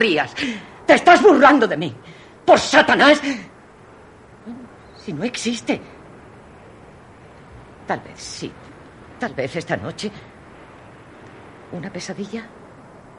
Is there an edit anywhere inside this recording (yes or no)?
no